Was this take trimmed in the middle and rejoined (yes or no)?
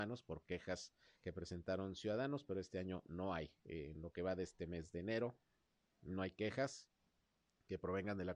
no